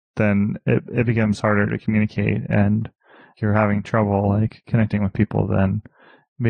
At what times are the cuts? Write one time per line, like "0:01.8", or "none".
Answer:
none